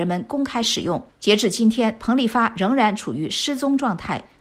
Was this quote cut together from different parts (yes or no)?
yes